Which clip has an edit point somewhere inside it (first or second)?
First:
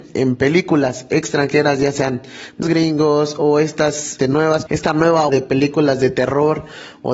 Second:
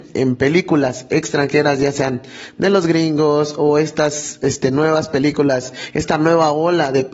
first